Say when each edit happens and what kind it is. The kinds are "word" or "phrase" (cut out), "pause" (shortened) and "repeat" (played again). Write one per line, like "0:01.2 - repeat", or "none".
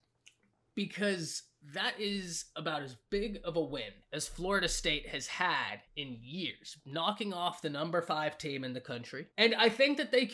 0:04.0 - pause
0:05.9 - pause
0:09.3 - pause

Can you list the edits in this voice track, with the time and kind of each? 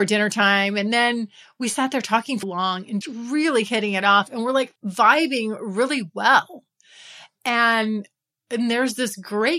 0:02.4 - word
0:03.0 - word
0:04.8 - pause

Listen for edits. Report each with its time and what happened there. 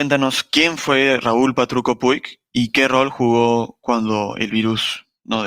none

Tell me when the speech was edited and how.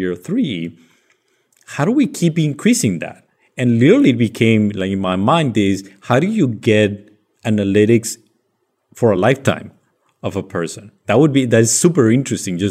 none

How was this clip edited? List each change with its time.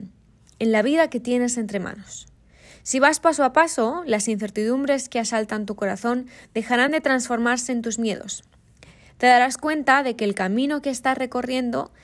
none

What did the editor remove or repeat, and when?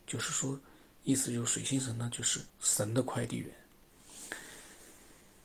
0:02.5 - pause

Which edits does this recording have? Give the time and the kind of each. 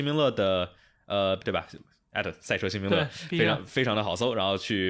0:01.4 - word

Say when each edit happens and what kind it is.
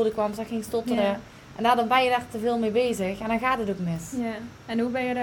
none

